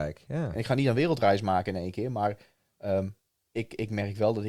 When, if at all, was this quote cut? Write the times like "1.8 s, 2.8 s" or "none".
none